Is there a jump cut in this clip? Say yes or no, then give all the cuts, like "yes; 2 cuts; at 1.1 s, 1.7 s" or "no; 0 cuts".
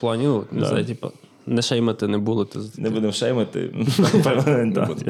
no; 0 cuts